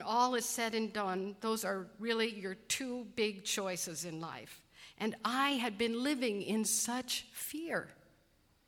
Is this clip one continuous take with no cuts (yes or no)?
yes